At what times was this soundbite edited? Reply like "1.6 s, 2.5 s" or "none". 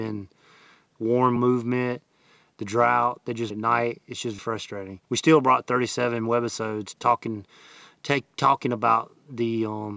1.4 s, 3.5 s, 4.4 s, 5.0 s, 7.0 s